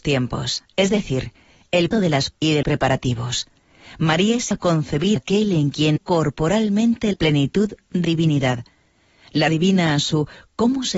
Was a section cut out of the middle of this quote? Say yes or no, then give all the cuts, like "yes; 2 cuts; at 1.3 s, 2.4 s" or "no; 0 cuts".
yes; 9 cuts; at 1.9 s, 2.3 s, 2.6 s, 4.5 s, 5.2 s, 6.0 s, 7.1 s, 8.0 s, 9.5 s